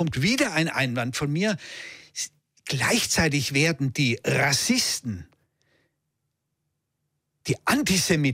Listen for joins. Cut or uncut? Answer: uncut